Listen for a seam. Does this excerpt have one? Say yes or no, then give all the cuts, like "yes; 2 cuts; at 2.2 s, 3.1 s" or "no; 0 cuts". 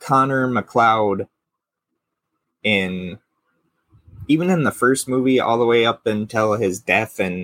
no; 0 cuts